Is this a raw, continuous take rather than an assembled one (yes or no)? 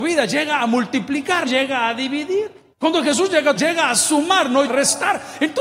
no